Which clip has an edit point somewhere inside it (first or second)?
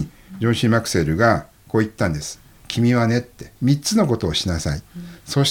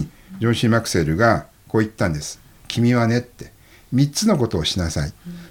first